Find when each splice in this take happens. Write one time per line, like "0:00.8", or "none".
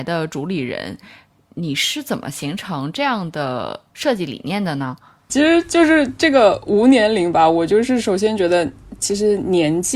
none